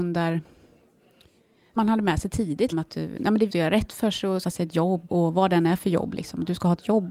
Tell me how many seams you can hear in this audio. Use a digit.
5